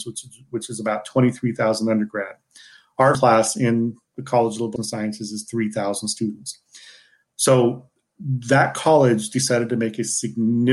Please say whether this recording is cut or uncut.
cut